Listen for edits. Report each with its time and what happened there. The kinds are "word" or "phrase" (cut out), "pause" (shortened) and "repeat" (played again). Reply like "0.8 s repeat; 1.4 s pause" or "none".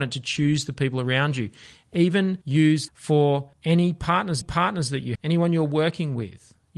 2.4 s pause; 2.9 s phrase; 3.5 s pause; 4.4 s repeat; 5.2 s word